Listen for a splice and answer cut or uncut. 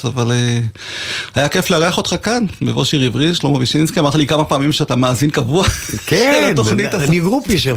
uncut